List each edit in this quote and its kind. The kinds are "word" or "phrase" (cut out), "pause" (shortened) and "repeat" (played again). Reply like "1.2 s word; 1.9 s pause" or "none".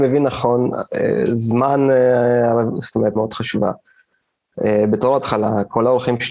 3.2 s phrase